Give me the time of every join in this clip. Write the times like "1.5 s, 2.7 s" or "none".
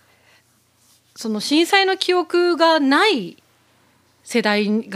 none